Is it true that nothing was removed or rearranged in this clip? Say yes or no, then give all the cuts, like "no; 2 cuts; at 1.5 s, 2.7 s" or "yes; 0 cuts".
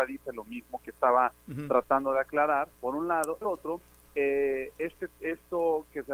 no; 2 cuts; at 2.7 s, 3.4 s